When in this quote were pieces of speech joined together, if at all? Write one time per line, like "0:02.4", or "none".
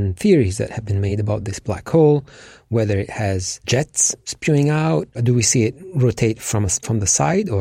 none